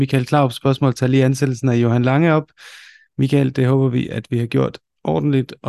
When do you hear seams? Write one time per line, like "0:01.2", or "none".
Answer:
none